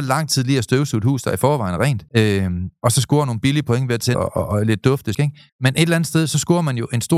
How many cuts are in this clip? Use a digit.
4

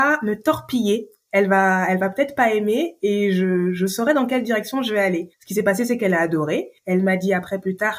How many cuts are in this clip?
2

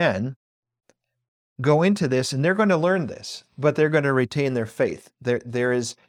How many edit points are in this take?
0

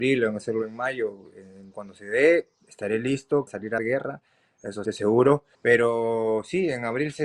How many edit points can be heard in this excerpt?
5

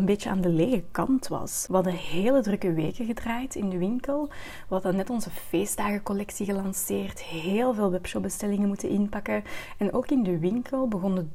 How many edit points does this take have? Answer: 0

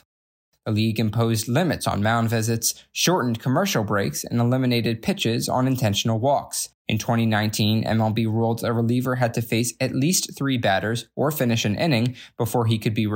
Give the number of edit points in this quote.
1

